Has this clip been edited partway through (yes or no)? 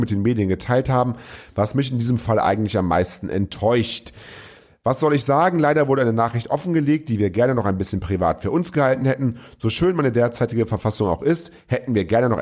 no